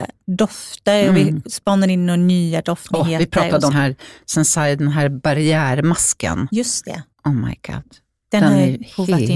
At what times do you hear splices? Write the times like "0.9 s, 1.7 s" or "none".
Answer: 3.7 s, 7.1 s